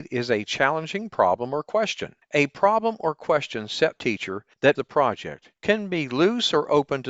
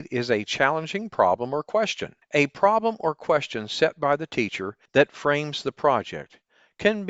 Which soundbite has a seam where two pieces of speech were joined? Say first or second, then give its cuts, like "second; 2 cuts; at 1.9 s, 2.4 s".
first; 3 cuts; at 3.9 s, 4.7 s, 5.6 s